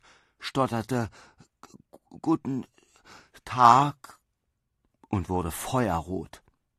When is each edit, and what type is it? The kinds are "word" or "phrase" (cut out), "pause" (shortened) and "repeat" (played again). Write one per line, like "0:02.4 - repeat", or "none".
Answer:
none